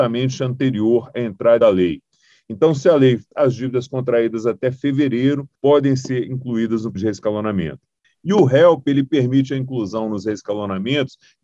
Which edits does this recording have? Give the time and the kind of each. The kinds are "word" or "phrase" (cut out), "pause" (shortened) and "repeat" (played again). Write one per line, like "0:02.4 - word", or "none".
0:01.6 - phrase
0:03.3 - phrase
0:05.6 - pause
0:07.0 - word
0:08.0 - pause